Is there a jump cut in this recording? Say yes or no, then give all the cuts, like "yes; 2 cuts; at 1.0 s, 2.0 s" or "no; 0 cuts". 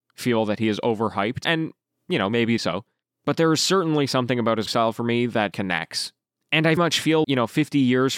yes; 6 cuts; at 1.4 s, 2.6 s, 4.7 s, 5.5 s, 6.8 s, 7.2 s